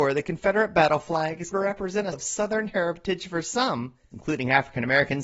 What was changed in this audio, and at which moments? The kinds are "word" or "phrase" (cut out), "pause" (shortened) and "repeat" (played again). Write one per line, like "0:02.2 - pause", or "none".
0:01.5 - word
0:02.1 - word
0:04.1 - phrase